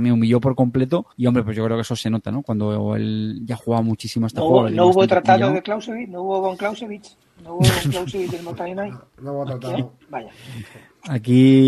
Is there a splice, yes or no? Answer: yes